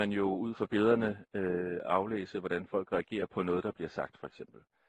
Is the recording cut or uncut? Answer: uncut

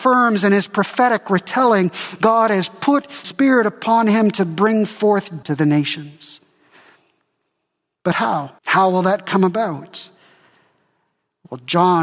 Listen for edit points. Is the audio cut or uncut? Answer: cut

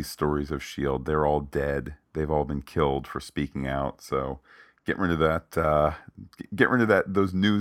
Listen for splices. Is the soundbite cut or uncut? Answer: uncut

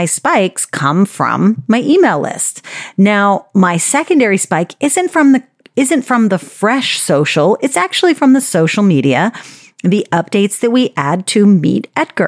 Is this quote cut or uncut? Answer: uncut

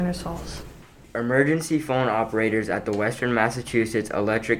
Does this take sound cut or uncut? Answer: uncut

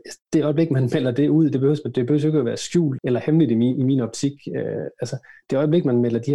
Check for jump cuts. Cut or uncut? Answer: cut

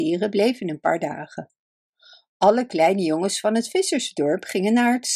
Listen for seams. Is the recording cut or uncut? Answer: uncut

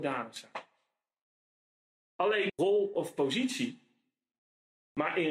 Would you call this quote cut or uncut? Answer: cut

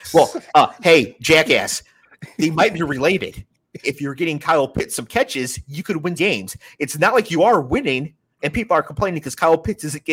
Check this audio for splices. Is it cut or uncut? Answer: cut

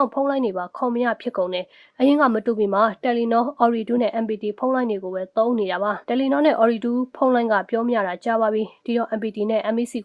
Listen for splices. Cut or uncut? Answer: uncut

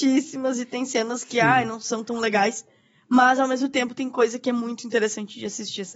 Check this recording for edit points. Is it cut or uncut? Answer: uncut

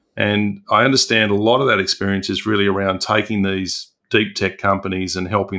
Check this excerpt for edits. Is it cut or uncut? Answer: uncut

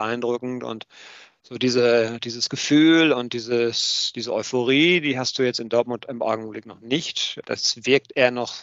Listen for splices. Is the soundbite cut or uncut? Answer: uncut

